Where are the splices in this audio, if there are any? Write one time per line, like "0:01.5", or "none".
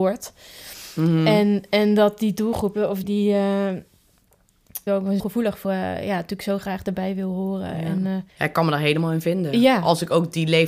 0:03.0
0:04.9
0:05.2
0:05.6
0:08.3

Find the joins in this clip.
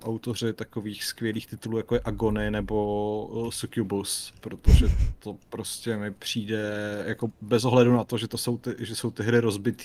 none

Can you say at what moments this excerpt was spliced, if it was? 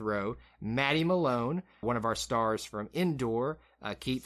0:01.8

